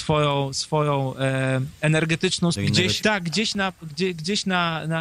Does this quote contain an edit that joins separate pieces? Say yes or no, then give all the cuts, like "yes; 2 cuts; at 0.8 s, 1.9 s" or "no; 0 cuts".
yes; 2 cuts; at 2.5 s, 3.0 s